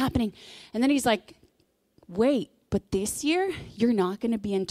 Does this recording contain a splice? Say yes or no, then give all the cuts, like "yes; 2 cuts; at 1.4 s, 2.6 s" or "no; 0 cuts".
no; 0 cuts